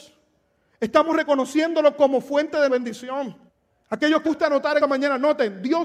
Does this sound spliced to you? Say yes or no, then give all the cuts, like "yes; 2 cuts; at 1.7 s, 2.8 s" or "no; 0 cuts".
yes; 4 cuts; at 2.7 s, 3.5 s, 4.2 s, 4.8 s